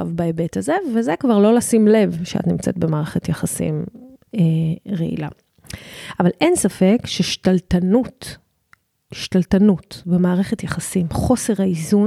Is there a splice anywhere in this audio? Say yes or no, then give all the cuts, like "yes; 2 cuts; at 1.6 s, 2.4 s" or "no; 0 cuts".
no; 0 cuts